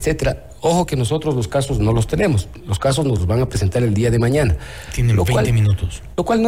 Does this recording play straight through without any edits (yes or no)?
yes